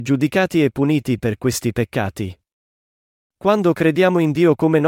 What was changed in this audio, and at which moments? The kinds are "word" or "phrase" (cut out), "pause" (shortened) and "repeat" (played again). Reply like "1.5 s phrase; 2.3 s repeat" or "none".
none